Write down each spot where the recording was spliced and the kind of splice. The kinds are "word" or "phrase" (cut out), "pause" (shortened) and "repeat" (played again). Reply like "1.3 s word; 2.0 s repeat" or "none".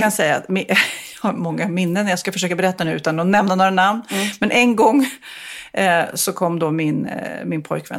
none